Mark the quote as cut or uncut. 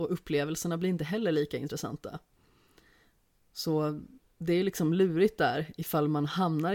uncut